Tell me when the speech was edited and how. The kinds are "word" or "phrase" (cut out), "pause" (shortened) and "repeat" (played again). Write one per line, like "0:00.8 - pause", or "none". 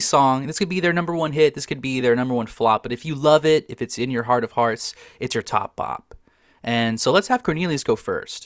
none